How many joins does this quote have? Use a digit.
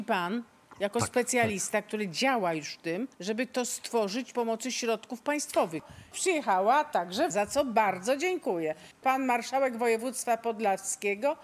4